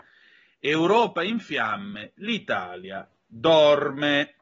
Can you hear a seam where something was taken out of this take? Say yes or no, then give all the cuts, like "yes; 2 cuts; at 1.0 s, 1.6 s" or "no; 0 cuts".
no; 0 cuts